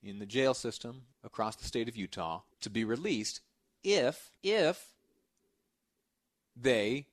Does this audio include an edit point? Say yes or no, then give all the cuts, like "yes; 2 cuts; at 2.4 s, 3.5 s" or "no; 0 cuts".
yes; 3 cuts; at 1.1 s, 2.5 s, 4.4 s